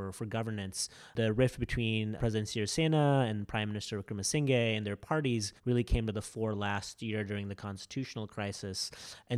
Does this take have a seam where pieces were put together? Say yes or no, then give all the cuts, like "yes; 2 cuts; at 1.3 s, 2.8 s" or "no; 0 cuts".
yes; 2 cuts; at 2.2 s, 5.6 s